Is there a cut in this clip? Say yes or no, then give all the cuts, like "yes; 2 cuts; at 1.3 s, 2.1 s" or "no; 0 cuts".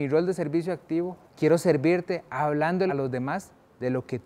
yes; 2 cuts; at 1.3 s, 2.9 s